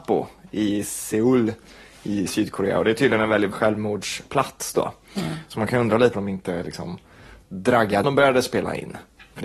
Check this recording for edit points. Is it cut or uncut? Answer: cut